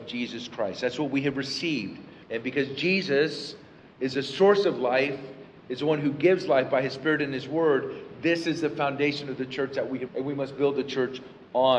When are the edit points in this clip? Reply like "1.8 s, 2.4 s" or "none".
2.2 s, 10.1 s